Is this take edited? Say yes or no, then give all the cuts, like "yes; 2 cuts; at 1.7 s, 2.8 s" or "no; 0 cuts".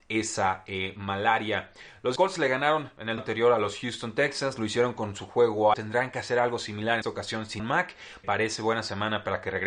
yes; 6 cuts; at 2.2 s, 3.2 s, 5.7 s, 7.0 s, 7.6 s, 8.2 s